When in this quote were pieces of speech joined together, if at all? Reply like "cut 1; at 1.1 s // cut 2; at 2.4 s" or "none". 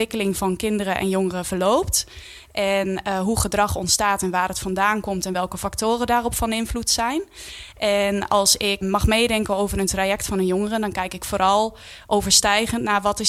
none